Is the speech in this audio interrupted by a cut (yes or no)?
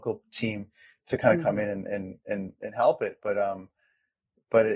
no